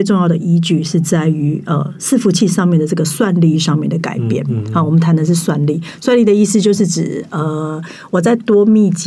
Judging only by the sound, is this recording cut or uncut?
uncut